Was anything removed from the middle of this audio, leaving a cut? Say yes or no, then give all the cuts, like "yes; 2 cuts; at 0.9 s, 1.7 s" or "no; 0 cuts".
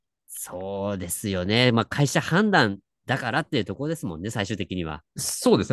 no; 0 cuts